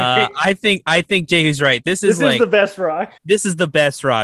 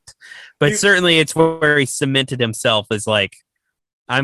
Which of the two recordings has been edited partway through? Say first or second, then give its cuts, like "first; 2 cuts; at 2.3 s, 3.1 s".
first; 1 cut; at 3.2 s